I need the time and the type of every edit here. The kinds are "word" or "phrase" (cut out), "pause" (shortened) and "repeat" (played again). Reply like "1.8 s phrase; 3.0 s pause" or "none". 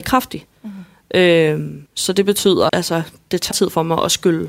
1.9 s pause; 2.7 s word; 3.5 s word